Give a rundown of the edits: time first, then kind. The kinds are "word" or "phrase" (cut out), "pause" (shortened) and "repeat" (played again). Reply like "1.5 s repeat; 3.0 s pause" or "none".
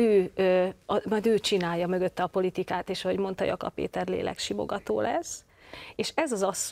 none